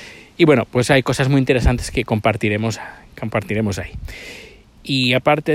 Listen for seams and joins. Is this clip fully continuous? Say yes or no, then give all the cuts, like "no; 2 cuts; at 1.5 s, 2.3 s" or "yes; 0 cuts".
yes; 0 cuts